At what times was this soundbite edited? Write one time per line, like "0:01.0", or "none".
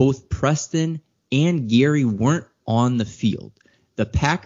none